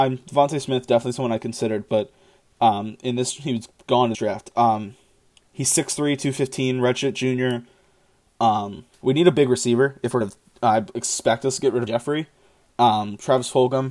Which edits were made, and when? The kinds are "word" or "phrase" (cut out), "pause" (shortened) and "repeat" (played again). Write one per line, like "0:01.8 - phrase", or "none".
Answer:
0:04.1 - word
0:08.9 - pause
0:10.2 - phrase
0:11.9 - word

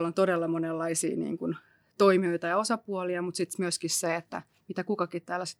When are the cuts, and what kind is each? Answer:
none

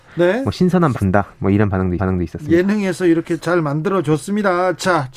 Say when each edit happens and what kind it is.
0:00.9 - word
0:02.0 - repeat
0:03.4 - word

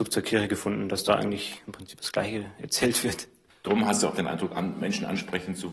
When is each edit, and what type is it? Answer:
none

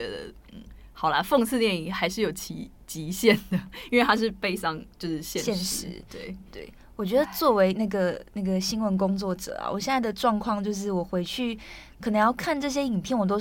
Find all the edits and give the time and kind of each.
0:06.5 - phrase

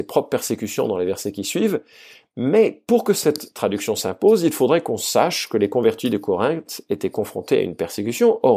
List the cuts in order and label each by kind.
none

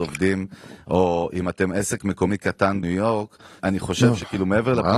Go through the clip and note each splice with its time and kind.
0:02.8 - word
0:03.6 - word

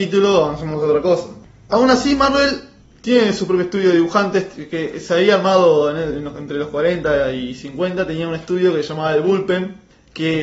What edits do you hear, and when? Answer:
none

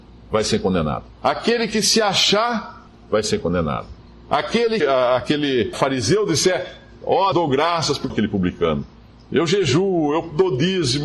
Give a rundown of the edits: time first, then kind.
0:01.1 - pause
0:04.8 - phrase
0:05.7 - word
0:07.3 - phrase
0:08.1 - phrase

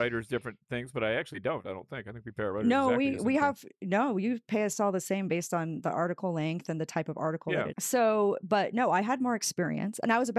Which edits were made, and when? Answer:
0:07.7 - phrase

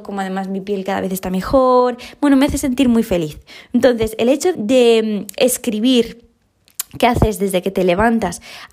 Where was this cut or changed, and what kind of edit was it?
0:04.5 - word

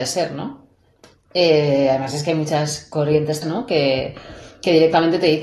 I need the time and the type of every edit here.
0:00.9 - pause
0:03.4 - word

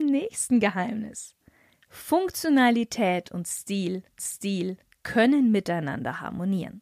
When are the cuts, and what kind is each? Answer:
0:04.2 - repeat

